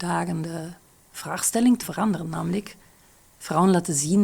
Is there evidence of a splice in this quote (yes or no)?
yes